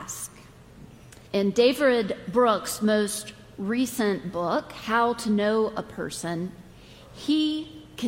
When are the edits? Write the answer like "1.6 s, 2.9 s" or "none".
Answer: 1.3 s